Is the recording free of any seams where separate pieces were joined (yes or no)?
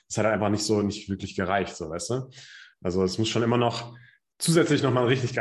yes